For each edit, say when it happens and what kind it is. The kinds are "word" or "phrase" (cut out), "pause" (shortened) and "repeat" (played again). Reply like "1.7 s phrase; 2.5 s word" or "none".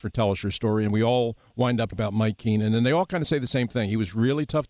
1.9 s word